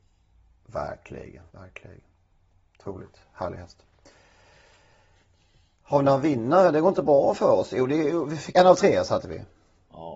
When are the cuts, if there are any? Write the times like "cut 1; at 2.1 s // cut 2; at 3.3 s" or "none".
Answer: cut 1; at 1.5 s // cut 2; at 8.5 s